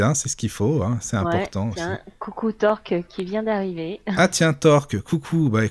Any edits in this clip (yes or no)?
no